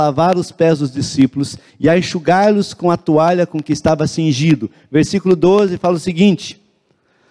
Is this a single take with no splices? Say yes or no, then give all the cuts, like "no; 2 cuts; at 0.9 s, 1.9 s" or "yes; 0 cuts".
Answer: yes; 0 cuts